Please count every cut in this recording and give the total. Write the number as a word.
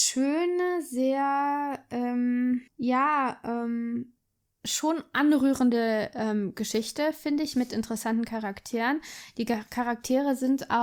two